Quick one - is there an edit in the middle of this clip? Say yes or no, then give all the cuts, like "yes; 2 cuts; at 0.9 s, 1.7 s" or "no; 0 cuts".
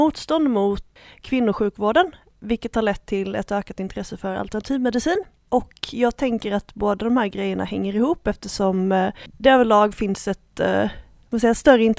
no; 0 cuts